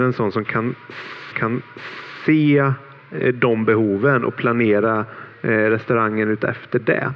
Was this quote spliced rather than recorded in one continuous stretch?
yes; 1 cut; at 1.3 s

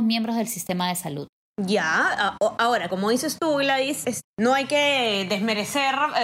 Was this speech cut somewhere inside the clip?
yes; 2 cuts; at 2.9 s, 4.0 s

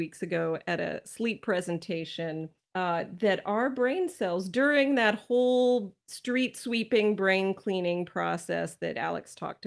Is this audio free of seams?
no; 2 cuts; at 2.6 s, 6.0 s

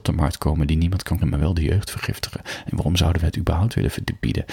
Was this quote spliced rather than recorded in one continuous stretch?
yes; 1 cut; at 1.2 s

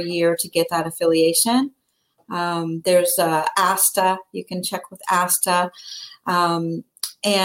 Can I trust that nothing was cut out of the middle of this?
yes; 0 cuts

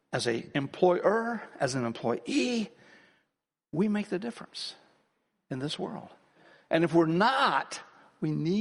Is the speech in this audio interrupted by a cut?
no; 0 cuts

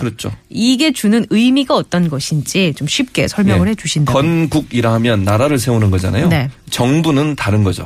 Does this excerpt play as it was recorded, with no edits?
yes; 0 cuts

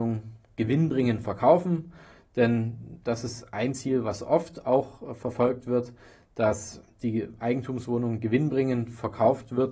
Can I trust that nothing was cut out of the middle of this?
yes; 0 cuts

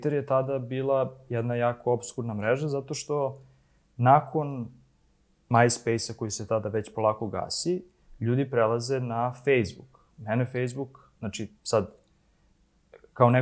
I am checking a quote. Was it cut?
no; 0 cuts

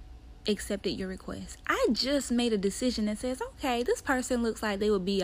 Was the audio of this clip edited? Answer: no; 0 cuts

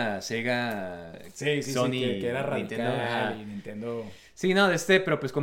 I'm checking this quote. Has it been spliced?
no; 0 cuts

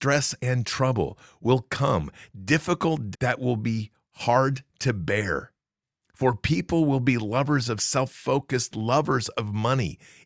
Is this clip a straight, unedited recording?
no; 3 cuts; at 3.1 s, 5.8 s, 7.8 s

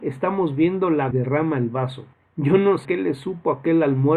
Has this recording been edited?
yes; 3 cuts; at 1.1 s, 2.1 s, 2.8 s

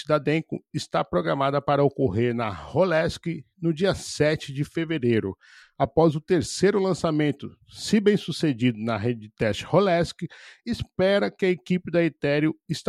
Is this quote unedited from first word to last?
yes; 0 cuts

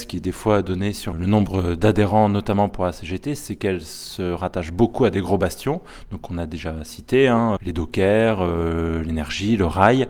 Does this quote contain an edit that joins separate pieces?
yes; 2 cuts; at 1.1 s, 7.6 s

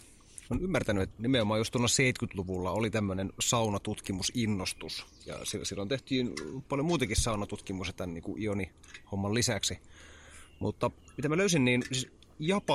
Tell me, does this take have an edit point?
yes; 1 cut; at 1.1 s

